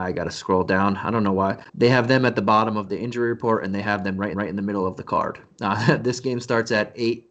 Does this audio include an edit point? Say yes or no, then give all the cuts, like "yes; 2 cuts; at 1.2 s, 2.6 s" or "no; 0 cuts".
yes; 3 cuts; at 1.7 s, 2.9 s, 4.3 s